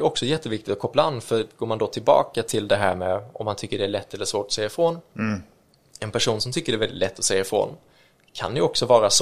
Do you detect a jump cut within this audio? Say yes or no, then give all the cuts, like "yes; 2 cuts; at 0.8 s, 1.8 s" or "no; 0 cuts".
no; 0 cuts